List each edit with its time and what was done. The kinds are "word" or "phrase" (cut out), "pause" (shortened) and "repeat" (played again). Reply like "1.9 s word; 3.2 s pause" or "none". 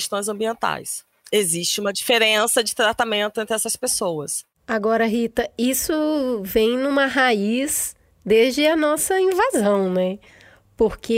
none